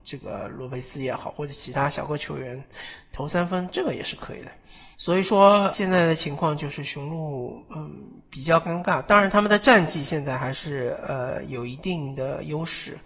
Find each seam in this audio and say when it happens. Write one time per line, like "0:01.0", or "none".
0:04.9
0:05.7